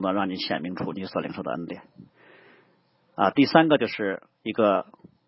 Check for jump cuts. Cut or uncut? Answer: uncut